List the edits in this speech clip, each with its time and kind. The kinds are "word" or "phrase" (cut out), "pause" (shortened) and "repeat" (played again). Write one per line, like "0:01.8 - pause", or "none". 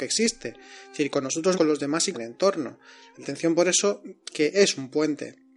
0:01.5 - word
0:02.1 - word
0:03.2 - word
0:04.3 - word